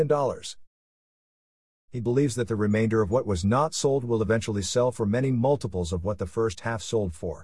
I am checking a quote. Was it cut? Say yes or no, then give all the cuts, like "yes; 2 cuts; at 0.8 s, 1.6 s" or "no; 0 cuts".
no; 0 cuts